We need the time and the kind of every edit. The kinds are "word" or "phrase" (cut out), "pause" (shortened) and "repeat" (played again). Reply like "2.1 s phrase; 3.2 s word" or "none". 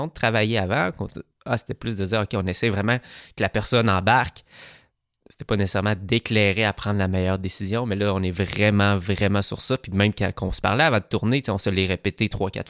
none